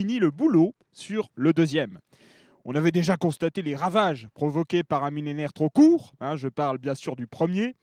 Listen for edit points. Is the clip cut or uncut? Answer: uncut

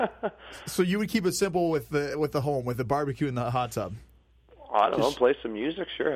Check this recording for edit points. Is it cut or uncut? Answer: uncut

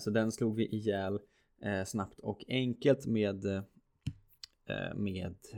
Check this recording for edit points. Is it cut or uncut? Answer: uncut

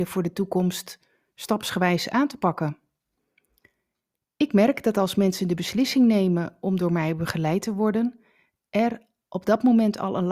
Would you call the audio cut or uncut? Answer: uncut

